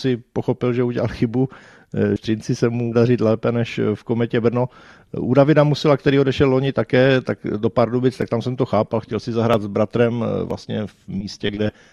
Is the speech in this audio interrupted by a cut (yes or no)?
yes